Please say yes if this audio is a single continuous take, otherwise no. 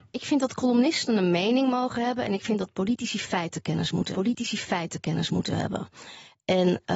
no